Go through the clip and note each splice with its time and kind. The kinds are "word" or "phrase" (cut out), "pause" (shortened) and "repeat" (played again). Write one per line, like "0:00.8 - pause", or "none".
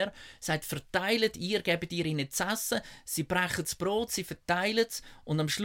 none